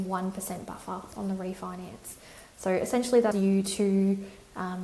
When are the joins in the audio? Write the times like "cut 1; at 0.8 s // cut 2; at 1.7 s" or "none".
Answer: cut 1; at 3.3 s